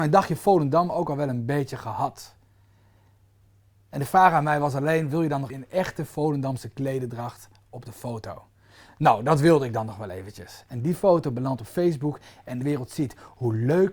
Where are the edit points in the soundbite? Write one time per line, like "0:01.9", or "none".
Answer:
0:05.5
0:12.6